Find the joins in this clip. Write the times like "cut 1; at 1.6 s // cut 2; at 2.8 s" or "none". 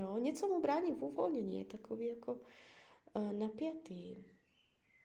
none